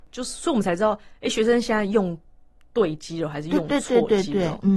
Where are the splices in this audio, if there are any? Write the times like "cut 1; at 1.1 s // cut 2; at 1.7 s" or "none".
none